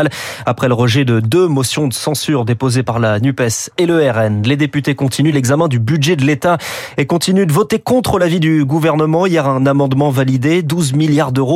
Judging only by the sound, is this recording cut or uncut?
uncut